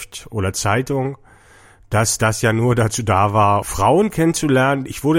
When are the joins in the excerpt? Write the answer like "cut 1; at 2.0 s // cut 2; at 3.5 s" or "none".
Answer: cut 1; at 3.6 s